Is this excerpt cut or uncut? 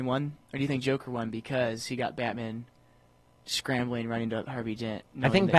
uncut